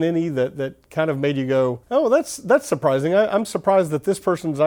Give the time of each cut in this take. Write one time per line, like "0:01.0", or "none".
0:01.8